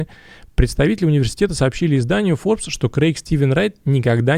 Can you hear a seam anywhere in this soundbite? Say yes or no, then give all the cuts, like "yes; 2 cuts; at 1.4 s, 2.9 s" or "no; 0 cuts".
no; 0 cuts